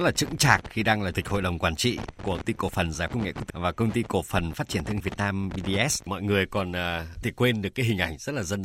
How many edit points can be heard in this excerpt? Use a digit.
7